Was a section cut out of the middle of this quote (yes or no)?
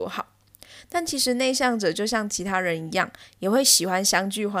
no